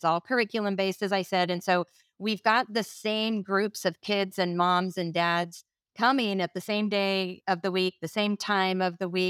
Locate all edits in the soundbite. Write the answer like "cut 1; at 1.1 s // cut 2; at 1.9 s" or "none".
none